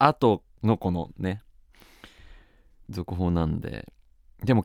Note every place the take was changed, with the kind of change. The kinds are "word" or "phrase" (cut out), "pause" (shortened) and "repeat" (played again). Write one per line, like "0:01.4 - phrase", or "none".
none